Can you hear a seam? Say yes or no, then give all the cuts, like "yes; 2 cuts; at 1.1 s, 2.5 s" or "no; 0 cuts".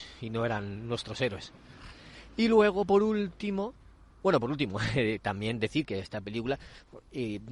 no; 0 cuts